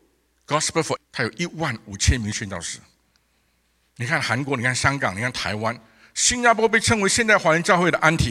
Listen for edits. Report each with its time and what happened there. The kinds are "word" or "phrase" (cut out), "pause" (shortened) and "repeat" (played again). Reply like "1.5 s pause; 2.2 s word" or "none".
1.0 s word